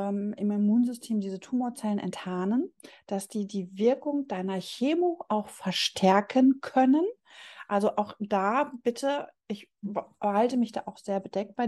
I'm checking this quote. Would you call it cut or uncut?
uncut